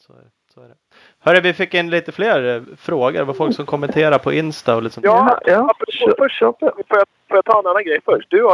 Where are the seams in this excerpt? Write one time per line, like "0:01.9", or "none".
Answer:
none